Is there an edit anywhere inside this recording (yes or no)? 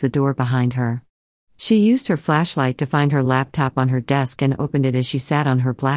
no